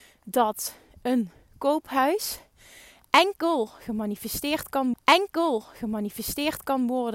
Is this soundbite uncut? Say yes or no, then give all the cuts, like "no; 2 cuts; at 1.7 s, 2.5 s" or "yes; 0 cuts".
no; 1 cut; at 4.9 s